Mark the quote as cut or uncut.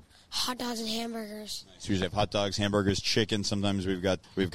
uncut